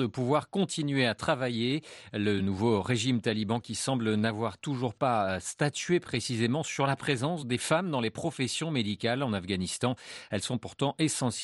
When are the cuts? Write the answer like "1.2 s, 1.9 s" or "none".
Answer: none